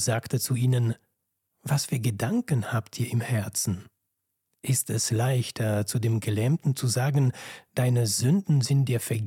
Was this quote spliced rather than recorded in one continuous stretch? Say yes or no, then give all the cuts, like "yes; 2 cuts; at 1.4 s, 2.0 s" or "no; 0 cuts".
no; 0 cuts